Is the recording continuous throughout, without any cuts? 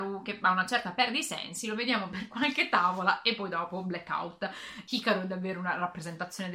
yes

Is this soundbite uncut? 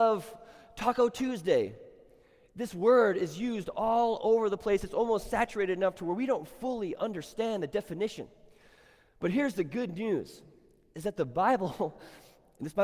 yes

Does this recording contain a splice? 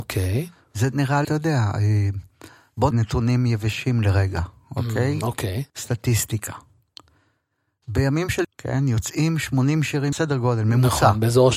yes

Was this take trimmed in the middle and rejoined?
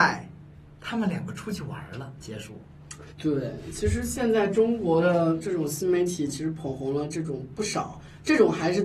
yes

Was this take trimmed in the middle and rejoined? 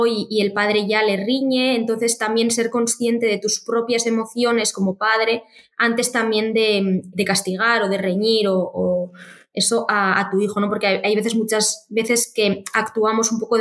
yes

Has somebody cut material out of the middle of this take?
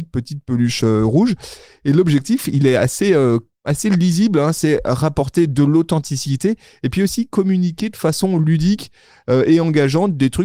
no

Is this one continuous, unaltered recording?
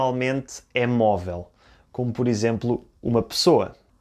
yes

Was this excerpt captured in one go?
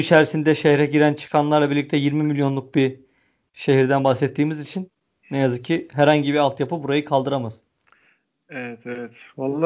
yes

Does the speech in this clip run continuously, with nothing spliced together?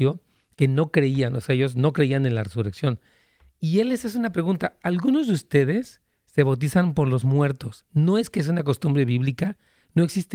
yes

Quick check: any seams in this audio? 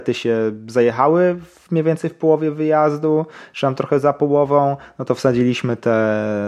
no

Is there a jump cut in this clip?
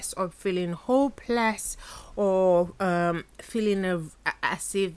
no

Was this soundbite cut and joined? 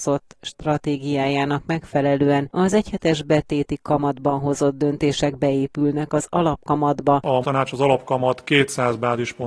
yes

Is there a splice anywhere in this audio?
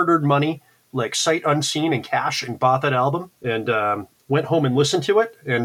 no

